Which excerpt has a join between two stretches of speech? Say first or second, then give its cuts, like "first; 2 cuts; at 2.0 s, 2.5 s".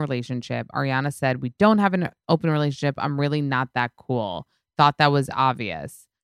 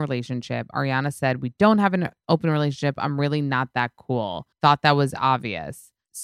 second; 1 cut; at 4.5 s